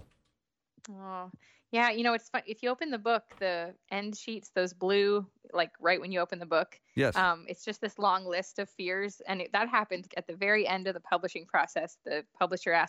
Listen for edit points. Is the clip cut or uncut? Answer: cut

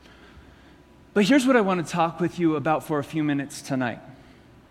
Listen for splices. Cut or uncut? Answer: uncut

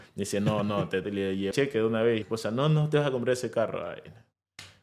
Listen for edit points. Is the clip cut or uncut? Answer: cut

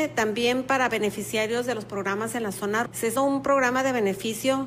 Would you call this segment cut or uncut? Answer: cut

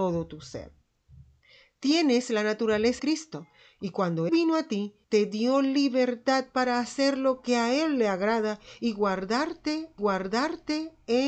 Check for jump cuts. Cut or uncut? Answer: cut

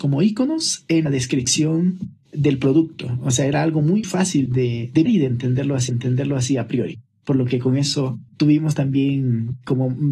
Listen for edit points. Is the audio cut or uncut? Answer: cut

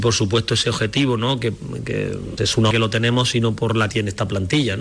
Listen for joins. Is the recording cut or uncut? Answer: cut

